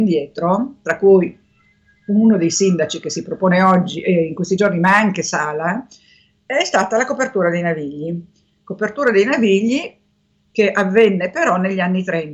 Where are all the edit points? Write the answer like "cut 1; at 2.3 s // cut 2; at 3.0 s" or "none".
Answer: none